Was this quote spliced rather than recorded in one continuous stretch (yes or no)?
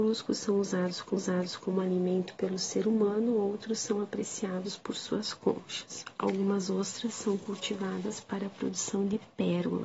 yes